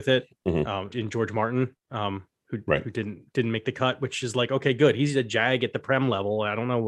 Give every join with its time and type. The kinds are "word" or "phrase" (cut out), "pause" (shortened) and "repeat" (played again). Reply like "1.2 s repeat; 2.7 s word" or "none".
0.9 s word; 1.8 s pause